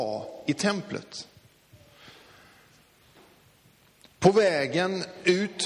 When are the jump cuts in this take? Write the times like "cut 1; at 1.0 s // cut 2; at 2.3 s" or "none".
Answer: none